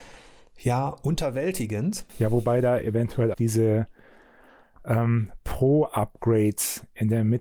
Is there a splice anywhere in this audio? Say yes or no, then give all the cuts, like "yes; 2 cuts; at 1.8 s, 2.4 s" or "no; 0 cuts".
yes; 1 cut; at 3.3 s